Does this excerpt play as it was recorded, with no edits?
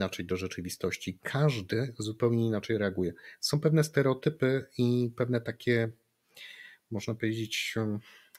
yes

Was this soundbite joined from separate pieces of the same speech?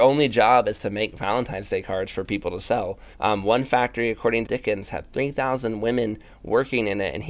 yes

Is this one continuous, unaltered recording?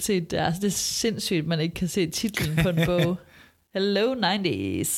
yes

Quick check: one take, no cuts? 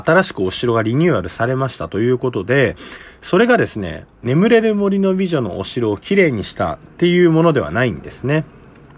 no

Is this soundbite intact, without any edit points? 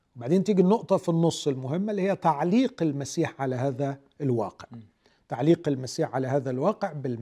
yes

